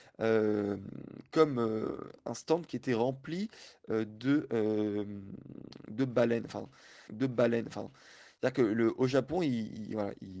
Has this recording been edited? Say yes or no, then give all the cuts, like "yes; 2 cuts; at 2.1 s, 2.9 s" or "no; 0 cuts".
yes; 1 cut; at 7.1 s